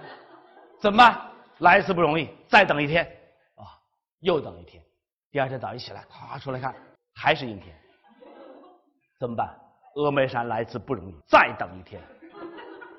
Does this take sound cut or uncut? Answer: cut